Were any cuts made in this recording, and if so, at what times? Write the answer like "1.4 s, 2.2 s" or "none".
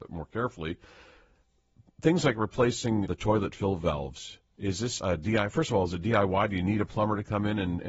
3.0 s, 5.0 s